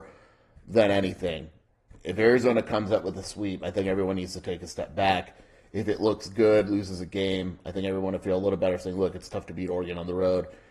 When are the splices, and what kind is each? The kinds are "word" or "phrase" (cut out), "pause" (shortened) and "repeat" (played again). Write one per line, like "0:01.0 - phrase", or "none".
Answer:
none